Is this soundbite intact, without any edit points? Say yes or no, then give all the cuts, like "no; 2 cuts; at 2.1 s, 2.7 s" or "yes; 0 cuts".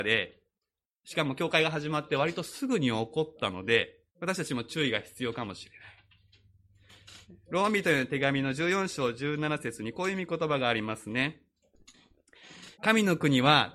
no; 3 cuts; at 4.1 s, 7.2 s, 12.7 s